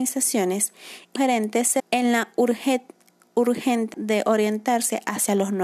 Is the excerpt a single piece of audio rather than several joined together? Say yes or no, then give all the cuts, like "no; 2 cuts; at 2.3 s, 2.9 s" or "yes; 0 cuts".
no; 3 cuts; at 1.2 s, 1.8 s, 3.9 s